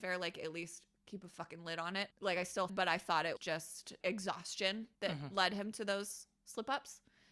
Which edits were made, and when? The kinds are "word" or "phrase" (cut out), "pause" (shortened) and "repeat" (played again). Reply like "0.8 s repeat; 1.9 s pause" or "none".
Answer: 2.1 s pause; 2.7 s phrase; 3.4 s word; 4.0 s word; 4.9 s word